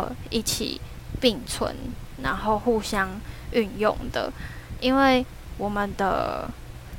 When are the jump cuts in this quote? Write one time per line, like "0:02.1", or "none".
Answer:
0:02.2